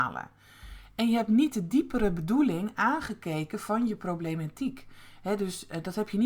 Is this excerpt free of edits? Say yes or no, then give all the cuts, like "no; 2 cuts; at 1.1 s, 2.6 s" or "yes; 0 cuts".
yes; 0 cuts